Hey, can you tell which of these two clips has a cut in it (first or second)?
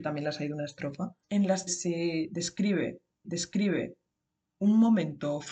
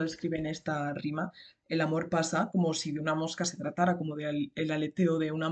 first